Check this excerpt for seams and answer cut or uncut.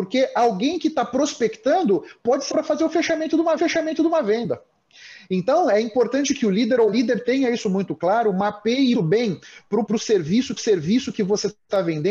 cut